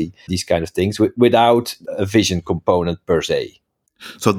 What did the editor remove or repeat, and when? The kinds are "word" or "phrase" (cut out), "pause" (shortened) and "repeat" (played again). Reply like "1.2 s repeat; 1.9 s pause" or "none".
none

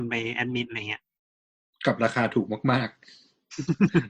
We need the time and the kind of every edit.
none

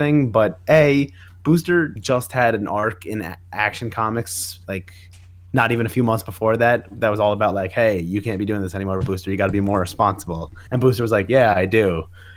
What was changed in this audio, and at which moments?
2.0 s word; 10.7 s pause

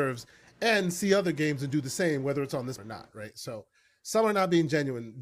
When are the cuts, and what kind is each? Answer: 2.8 s word

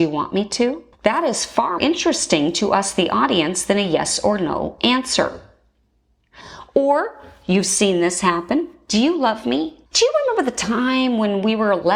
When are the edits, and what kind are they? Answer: 0.9 s pause; 1.8 s word; 9.9 s pause

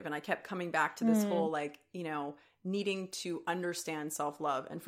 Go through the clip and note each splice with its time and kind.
none

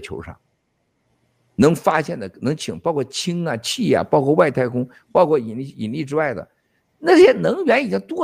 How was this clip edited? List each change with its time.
none

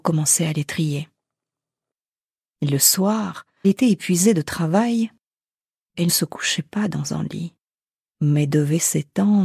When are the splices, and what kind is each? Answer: 3.6 s word; 6.1 s word

